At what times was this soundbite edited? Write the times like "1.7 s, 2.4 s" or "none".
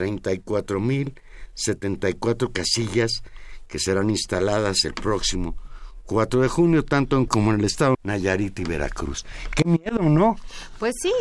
7.3 s, 7.9 s